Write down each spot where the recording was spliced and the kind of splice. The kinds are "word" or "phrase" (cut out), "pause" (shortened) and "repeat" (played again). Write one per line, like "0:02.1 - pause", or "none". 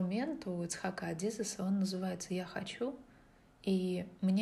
none